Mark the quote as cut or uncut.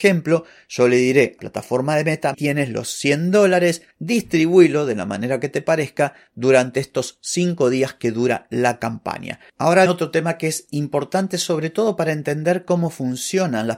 cut